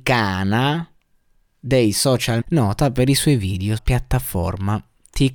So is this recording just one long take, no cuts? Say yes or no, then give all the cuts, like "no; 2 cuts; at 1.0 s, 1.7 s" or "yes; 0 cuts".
no; 2 cuts; at 2.4 s, 3.8 s